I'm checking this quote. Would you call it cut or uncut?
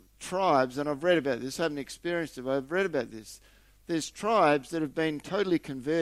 uncut